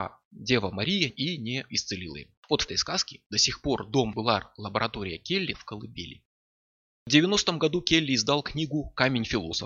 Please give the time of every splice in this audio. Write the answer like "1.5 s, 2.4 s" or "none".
1.1 s, 2.4 s, 2.7 s, 4.1 s, 5.5 s